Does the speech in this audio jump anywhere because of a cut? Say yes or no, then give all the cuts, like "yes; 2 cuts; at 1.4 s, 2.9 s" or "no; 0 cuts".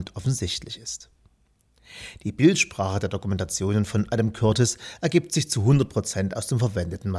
no; 0 cuts